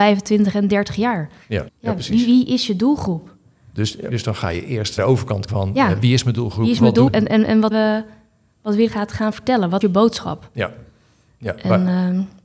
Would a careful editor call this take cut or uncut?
cut